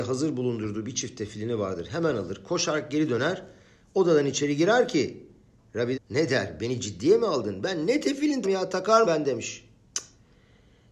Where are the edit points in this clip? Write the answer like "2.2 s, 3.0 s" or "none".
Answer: 5.9 s, 8.4 s, 9.0 s